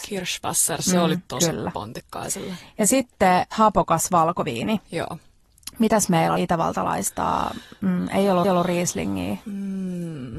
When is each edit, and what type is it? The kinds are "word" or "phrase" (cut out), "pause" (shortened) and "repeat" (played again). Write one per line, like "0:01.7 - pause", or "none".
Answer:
0:01.3 - phrase
0:03.5 - word
0:06.4 - phrase
0:08.4 - repeat